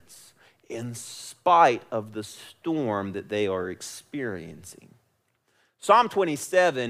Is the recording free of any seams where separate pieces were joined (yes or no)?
yes